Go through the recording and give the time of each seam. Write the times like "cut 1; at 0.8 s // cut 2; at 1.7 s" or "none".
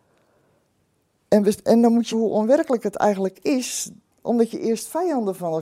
cut 1; at 2.1 s